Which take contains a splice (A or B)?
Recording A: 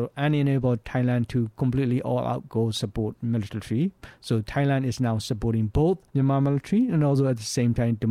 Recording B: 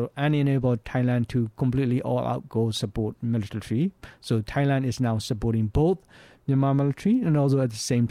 A